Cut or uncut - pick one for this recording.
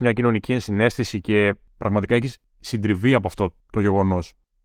uncut